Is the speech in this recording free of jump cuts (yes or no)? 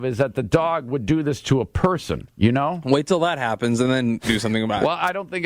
yes